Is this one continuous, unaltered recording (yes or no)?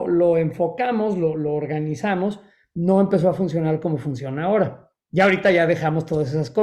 yes